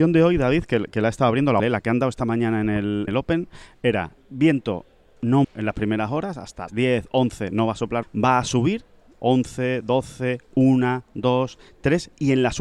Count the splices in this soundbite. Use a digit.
6